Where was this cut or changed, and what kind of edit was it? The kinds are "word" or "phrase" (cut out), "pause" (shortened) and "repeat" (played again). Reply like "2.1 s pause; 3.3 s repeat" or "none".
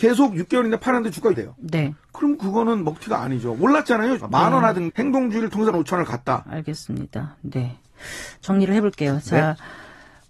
1.3 s word; 4.2 s word; 4.9 s word; 5.7 s word